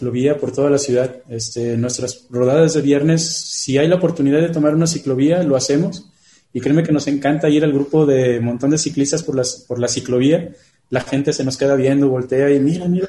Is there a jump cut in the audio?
no; 0 cuts

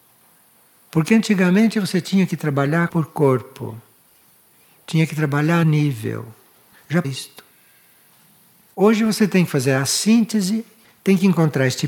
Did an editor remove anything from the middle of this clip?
yes; 3 cuts; at 2.9 s, 5.6 s, 7.0 s

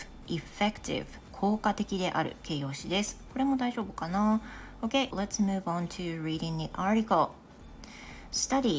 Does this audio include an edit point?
yes; 1 cut; at 5.1 s

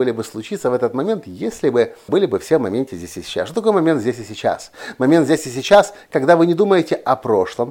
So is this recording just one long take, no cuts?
no; 1 cut; at 2.1 s

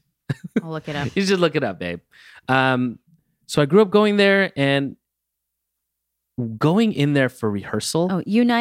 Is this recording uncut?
yes; 0 cuts

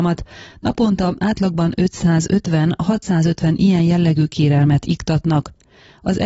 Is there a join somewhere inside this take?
no; 0 cuts

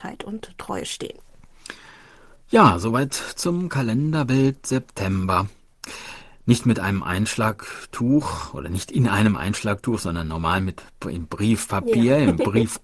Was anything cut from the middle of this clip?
no; 0 cuts

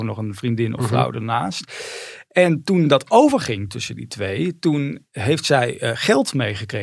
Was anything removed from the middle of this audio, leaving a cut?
no; 0 cuts

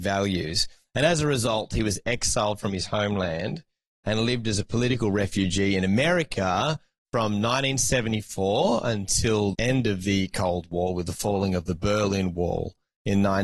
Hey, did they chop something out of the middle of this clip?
yes; 1 cut; at 9.5 s

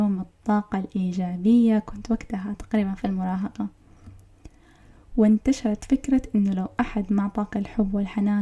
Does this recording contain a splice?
no; 0 cuts

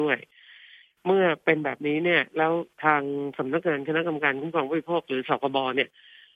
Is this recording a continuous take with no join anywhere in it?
no; 1 cut; at 2.7 s

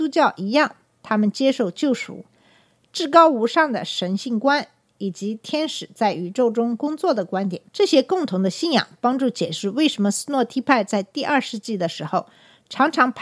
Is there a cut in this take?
yes; 1 cut; at 7.7 s

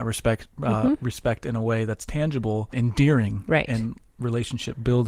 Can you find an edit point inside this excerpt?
yes; 1 cut; at 2.7 s

